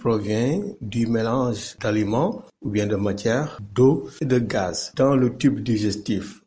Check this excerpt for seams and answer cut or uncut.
uncut